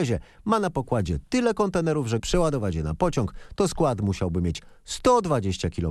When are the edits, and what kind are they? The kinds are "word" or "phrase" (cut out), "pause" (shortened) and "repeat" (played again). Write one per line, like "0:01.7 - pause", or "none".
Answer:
0:02.2 - word

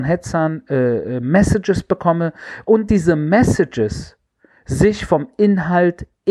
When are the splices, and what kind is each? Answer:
none

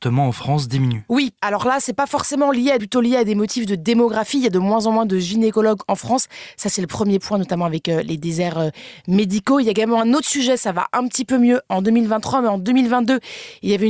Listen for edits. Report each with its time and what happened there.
0:02.8 - phrase

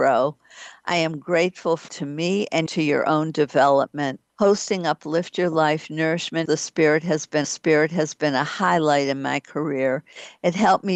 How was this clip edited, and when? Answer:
0:01.9 - phrase
0:02.7 - phrase
0:04.3 - pause
0:06.4 - word
0:07.4 - repeat

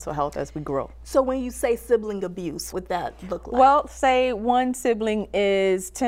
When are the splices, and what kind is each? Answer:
0:02.7 - word

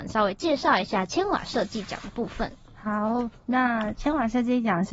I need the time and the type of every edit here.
none

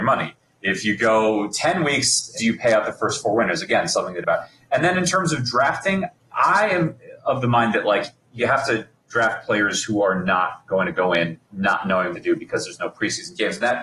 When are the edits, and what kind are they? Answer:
0:02.3 - word
0:04.2 - phrase
0:06.2 - pause
0:08.2 - pause
0:11.4 - pause
0:12.1 - phrase

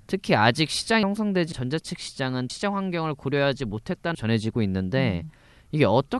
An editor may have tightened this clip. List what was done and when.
0:01.0 - word
0:01.5 - word
0:02.5 - word
0:04.1 - word

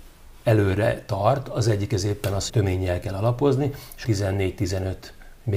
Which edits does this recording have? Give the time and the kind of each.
0:02.5 - phrase
0:03.0 - word
0:04.0 - word

